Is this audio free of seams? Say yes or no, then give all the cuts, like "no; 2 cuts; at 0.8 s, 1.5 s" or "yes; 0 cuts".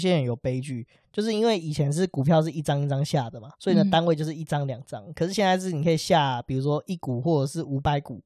no; 1 cut; at 3.5 s